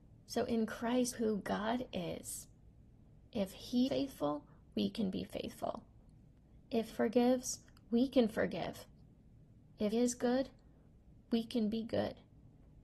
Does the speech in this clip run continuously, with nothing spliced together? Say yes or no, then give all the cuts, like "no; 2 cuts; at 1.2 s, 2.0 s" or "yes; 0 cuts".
no; 4 cuts; at 1.1 s, 3.9 s, 6.9 s, 9.9 s